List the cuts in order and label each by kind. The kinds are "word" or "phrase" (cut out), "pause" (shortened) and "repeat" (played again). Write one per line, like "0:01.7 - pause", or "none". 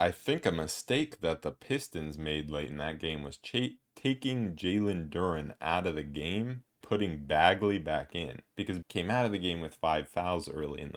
0:06.8 - word
0:08.8 - word